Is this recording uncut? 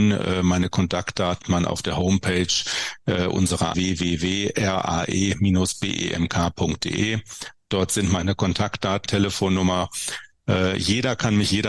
no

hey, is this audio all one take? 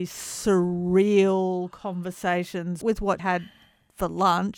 no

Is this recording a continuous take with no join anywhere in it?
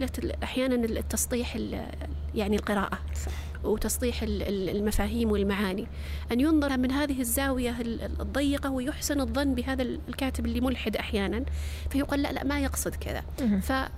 no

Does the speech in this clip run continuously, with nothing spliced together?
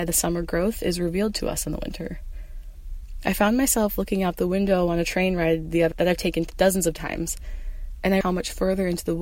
no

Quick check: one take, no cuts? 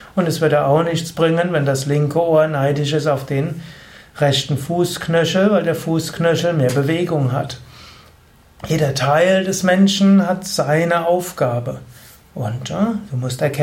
yes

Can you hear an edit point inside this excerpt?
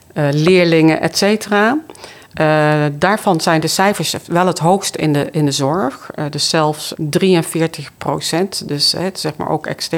yes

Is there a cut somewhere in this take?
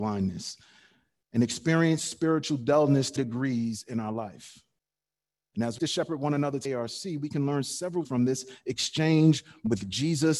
yes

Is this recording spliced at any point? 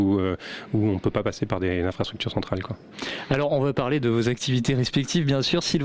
no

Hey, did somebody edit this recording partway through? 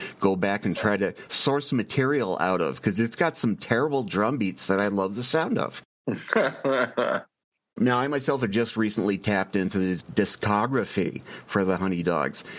no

